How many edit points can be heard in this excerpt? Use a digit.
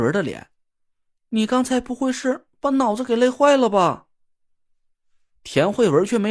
0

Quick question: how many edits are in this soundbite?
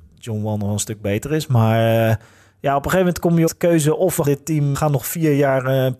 3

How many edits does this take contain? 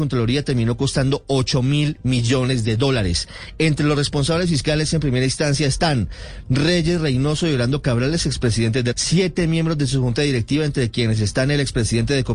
1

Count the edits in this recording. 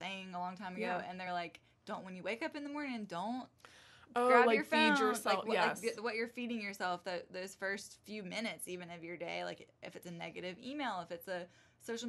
0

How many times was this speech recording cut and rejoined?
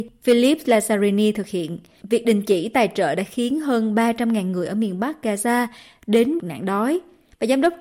1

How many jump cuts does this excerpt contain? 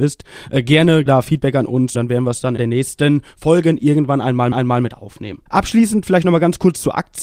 5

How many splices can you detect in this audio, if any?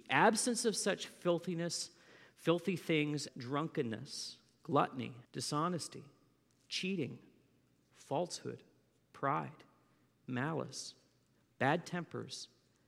2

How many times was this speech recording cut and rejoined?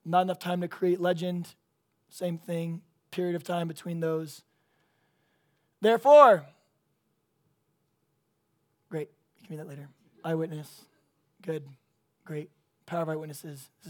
0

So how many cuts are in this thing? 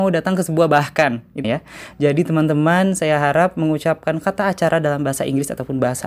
1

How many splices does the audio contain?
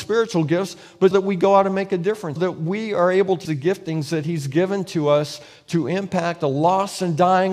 3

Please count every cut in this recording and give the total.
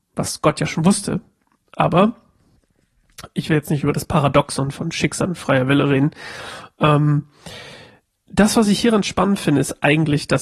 0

